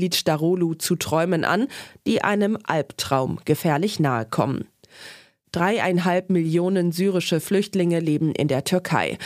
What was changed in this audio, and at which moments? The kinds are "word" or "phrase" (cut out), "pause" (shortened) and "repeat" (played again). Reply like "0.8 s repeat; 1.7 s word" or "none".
none